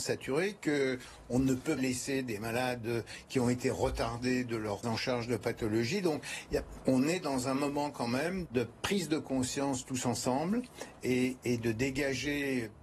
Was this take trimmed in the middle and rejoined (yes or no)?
yes